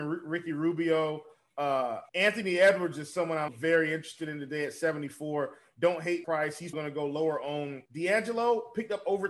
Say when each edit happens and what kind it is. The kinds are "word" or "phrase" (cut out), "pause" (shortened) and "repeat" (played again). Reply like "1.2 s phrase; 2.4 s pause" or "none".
2.1 s pause; 3.5 s word; 6.2 s word; 6.7 s word; 7.9 s pause